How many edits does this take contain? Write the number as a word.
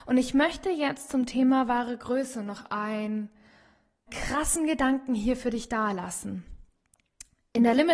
one